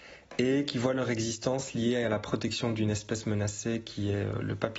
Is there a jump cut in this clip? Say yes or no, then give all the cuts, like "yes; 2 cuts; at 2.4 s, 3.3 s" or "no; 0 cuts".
no; 0 cuts